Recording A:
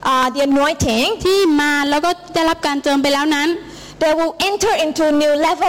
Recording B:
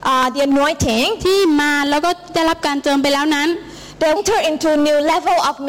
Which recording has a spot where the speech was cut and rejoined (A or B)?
B